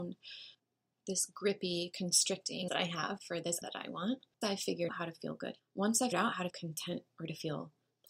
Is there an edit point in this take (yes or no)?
yes